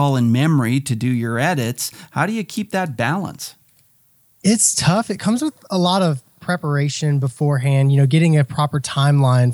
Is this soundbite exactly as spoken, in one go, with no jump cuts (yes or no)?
yes